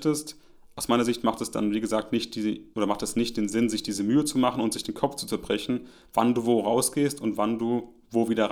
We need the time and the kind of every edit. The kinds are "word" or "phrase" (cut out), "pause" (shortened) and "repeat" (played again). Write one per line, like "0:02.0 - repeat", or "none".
0:02.7 - pause